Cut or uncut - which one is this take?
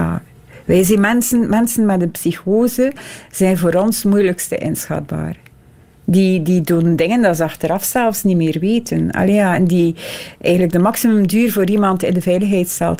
uncut